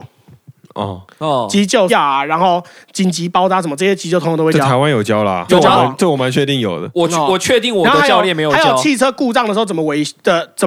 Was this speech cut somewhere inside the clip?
yes; 2 cuts; at 1.9 s, 5.5 s

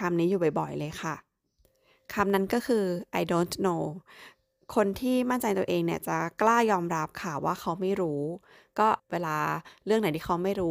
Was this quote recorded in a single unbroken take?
no; 1 cut; at 9.0 s

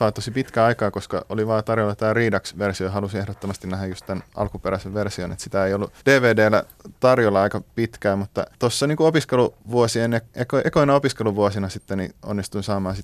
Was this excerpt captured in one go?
no; 3 cuts; at 6.0 s, 8.5 s, 9.6 s

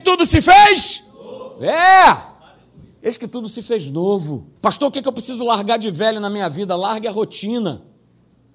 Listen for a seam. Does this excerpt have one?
yes; 1 cut; at 4.6 s

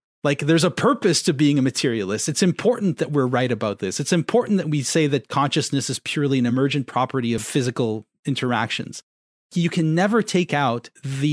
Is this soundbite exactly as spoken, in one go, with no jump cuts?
yes; 0 cuts

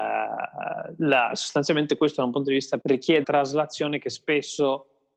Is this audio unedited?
no; 2 cuts; at 2.8 s, 3.2 s

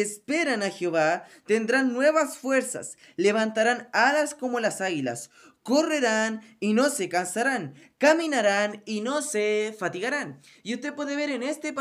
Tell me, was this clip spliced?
no; 0 cuts

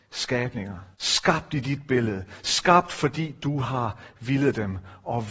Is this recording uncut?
no; 1 cut; at 0.9 s

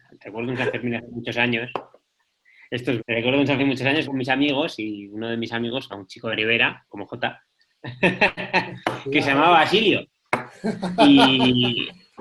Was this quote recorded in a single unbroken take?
no; 6 cuts; at 3.0 s, 3.6 s, 4.0 s, 5.9 s, 6.3 s, 6.9 s

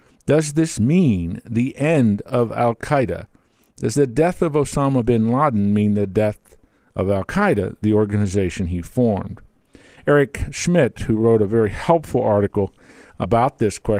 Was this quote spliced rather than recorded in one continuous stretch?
no; 0 cuts

